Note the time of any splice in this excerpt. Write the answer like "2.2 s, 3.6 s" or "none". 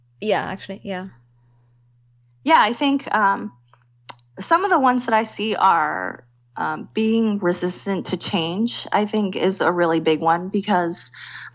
none